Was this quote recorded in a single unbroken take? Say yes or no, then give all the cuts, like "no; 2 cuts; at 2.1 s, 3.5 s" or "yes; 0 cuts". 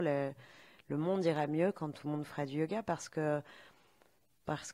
yes; 0 cuts